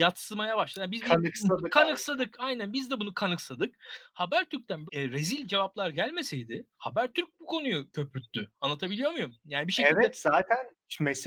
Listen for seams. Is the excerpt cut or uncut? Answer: cut